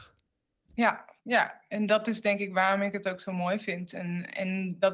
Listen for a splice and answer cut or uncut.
cut